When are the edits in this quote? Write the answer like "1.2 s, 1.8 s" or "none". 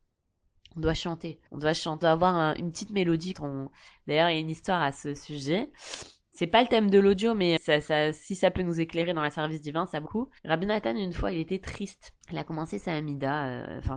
1.5 s, 2.0 s, 3.3 s, 7.6 s, 10.1 s, 10.4 s, 12.2 s